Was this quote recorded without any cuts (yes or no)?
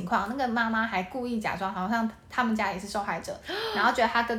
yes